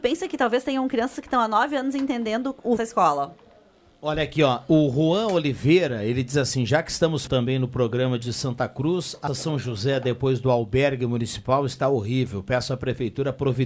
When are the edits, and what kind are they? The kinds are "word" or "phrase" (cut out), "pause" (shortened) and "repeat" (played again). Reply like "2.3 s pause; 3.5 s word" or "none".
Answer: 2.8 s phrase; 7.3 s word; 8.2 s word; 9.3 s word

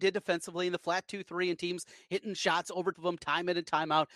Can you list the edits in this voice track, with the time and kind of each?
2.9 s word

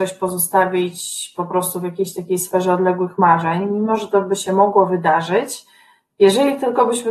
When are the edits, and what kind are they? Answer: none

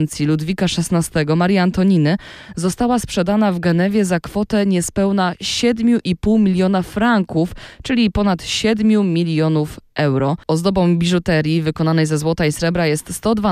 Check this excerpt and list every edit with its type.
10.4 s pause

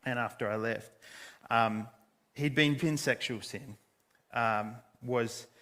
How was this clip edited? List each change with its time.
2.8 s word

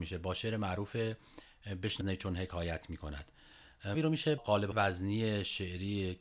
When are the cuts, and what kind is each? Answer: 2.0 s word; 3.9 s word; 4.4 s word; 4.7 s word

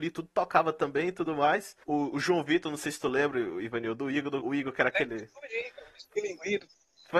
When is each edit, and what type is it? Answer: 1.8 s pause; 4.4 s word

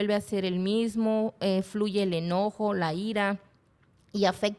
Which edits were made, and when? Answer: none

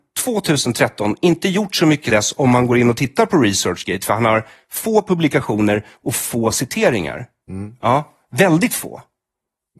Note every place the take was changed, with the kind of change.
2.1 s word

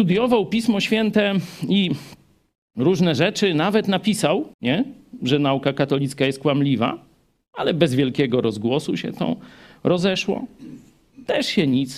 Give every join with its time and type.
4.5 s pause

